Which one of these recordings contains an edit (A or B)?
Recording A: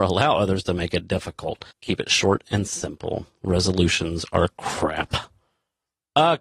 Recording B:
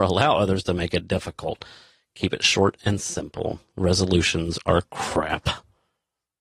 A